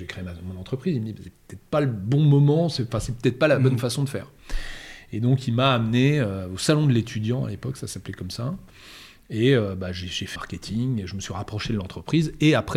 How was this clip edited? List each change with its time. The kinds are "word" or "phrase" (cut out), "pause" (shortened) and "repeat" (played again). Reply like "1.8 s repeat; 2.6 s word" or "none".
1.4 s pause; 10.4 s phrase